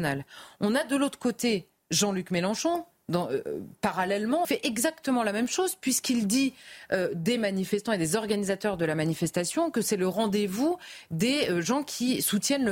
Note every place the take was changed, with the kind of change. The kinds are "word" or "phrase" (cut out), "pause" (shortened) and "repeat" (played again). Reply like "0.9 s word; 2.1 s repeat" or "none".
4.4 s phrase